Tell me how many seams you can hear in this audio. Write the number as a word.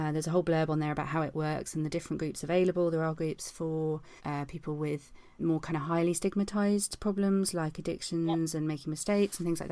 two